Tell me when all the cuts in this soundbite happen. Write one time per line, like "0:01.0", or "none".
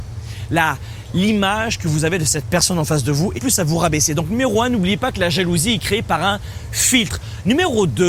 0:03.4

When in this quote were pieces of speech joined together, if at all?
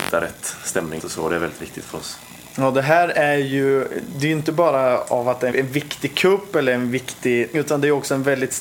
0:01.0
0:05.5
0:07.5

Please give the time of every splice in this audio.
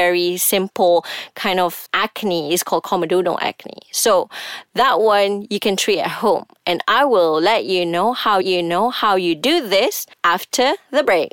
0:01.9
0:08.4

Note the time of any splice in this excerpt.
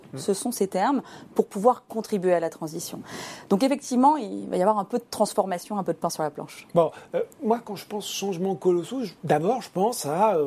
0:09.2

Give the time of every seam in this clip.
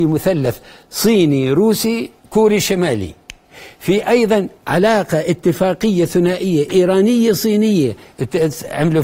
0:02.2
0:04.6

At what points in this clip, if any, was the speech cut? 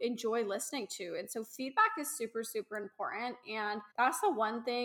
0:03.9

